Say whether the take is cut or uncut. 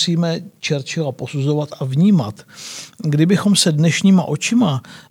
uncut